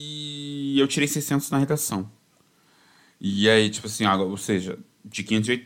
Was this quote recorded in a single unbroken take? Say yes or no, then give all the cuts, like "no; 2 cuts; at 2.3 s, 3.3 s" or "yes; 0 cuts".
yes; 0 cuts